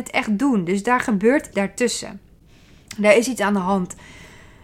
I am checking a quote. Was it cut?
yes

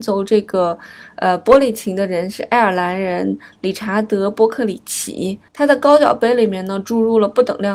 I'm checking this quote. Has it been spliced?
yes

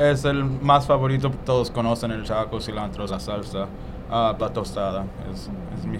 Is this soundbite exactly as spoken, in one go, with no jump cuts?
no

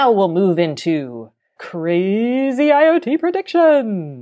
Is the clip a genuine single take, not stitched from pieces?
no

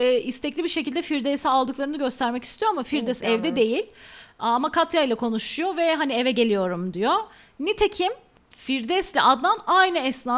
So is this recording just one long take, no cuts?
yes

